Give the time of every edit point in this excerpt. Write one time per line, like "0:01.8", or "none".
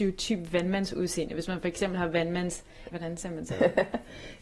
0:02.9